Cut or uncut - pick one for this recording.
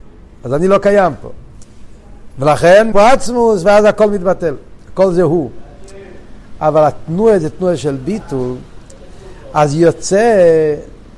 cut